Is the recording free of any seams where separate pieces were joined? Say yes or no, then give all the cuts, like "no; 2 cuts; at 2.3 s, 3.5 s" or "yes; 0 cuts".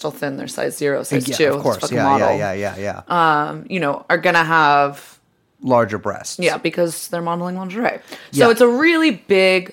yes; 0 cuts